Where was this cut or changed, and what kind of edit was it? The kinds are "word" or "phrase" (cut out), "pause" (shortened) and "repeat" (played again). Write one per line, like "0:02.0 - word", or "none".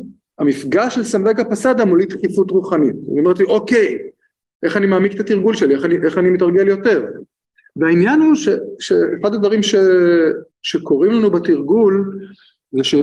0:10.5 - pause